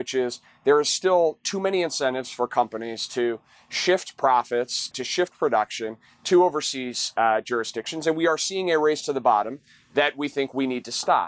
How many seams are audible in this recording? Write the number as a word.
one